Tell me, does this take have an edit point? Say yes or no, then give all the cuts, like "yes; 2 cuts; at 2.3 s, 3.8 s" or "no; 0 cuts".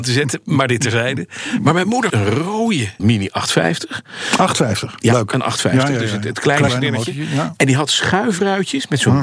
yes; 3 cuts; at 2.1 s, 3.0 s, 6.7 s